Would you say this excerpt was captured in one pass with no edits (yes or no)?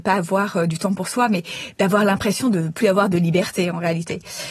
yes